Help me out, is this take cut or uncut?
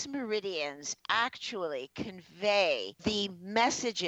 cut